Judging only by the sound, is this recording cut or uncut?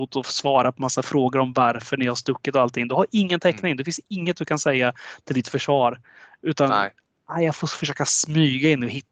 uncut